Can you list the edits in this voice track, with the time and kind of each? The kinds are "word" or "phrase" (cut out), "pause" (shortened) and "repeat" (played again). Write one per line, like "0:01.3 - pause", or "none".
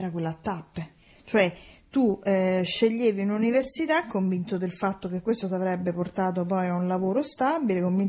none